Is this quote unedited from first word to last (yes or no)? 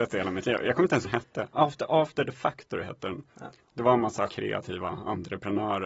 no